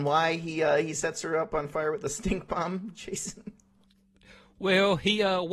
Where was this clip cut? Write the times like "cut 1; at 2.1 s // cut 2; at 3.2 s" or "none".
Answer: none